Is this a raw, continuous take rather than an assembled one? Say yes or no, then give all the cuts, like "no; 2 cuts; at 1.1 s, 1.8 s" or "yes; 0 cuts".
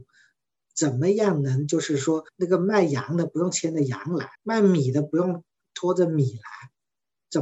no; 2 cuts; at 2.3 s, 4.3 s